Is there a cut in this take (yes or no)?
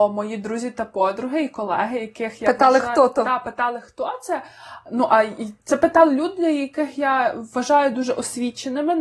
no